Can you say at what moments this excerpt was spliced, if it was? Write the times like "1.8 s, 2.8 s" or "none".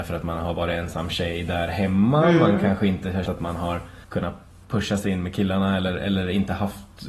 3.3 s, 4.0 s